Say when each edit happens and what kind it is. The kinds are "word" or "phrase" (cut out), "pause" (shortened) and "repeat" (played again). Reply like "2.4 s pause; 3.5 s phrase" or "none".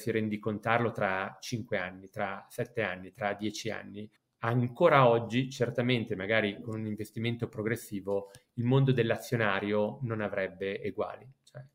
4.2 s pause